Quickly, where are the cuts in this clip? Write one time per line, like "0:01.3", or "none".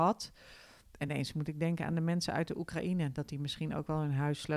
none